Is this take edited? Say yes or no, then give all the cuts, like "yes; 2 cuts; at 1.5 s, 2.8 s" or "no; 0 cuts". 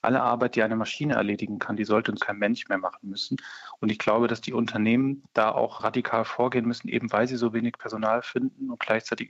yes; 1 cut; at 2.2 s